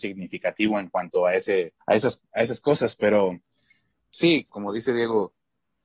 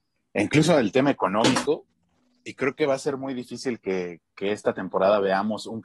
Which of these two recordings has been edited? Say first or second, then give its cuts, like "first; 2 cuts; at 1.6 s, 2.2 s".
first; 2 cuts; at 1.8 s, 4.5 s